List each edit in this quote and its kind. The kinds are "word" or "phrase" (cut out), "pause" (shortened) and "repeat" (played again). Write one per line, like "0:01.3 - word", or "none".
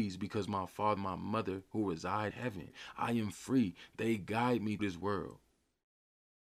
0:01.0 - word
0:02.3 - word
0:04.8 - word